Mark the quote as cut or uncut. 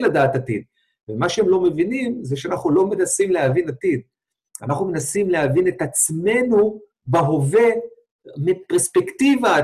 uncut